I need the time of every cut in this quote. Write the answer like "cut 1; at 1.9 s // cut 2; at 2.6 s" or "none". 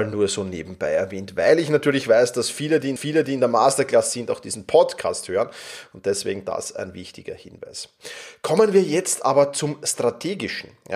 cut 1; at 3.0 s